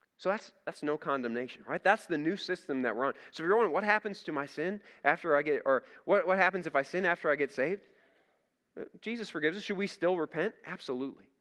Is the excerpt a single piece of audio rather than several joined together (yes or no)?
yes